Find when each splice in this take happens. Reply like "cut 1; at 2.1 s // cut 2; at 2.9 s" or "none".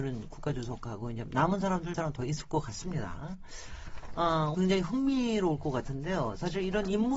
cut 1; at 1.9 s // cut 2; at 4.5 s